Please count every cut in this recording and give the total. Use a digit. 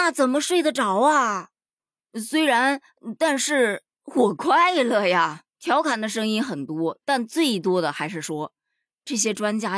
1